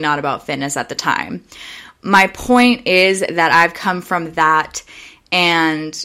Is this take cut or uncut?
uncut